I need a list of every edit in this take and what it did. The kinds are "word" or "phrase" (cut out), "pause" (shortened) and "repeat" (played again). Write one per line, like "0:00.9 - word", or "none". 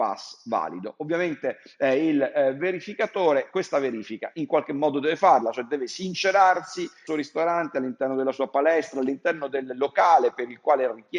0:07.1 - phrase